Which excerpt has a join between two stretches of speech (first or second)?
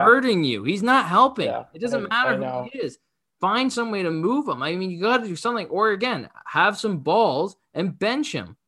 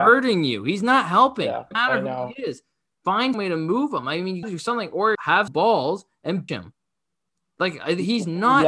second